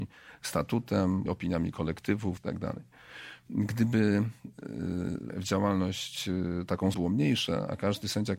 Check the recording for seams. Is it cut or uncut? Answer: cut